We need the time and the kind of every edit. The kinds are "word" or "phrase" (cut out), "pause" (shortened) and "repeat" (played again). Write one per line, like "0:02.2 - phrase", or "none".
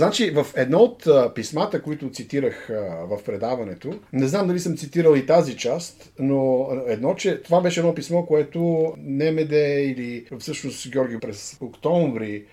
0:04.1 - pause
0:10.3 - pause
0:11.2 - word